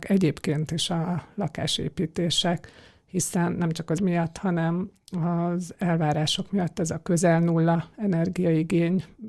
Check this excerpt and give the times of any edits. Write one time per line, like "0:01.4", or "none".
0:04.0